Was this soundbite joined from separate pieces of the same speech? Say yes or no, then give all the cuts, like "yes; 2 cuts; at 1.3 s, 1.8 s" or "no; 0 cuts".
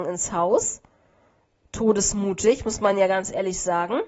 no; 0 cuts